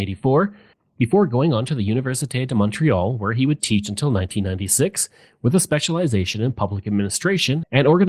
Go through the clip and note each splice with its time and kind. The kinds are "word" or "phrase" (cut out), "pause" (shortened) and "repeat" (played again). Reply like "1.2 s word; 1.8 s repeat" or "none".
none